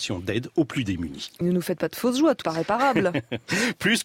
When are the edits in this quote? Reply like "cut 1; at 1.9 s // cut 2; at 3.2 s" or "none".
cut 1; at 1.4 s // cut 2; at 2.4 s